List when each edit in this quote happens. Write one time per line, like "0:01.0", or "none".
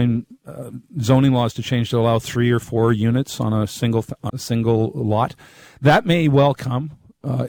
0:04.3

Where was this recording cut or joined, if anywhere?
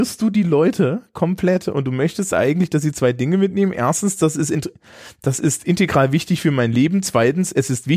none

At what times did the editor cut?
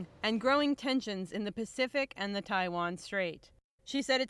none

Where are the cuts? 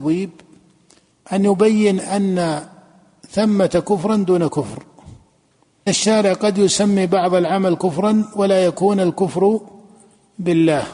0:05.9

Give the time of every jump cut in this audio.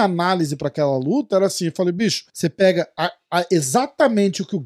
0:02.3

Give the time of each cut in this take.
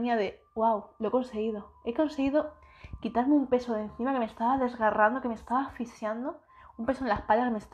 none

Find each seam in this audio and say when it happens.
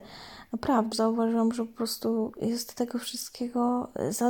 0:00.9

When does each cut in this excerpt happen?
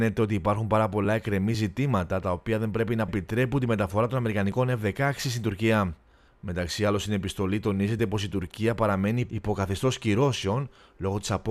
none

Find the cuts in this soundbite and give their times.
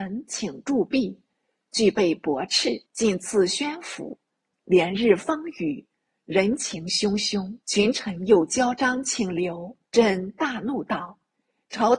0:02.9
0:07.6
0:09.9

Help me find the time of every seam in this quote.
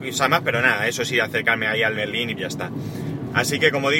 0:01.9
0:02.4

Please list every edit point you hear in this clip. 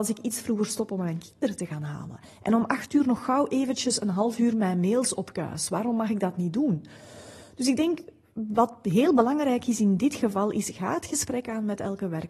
none

